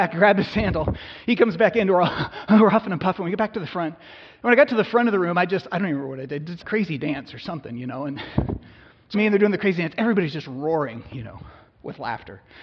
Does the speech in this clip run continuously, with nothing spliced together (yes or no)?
no